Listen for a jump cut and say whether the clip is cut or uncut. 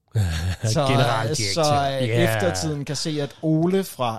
uncut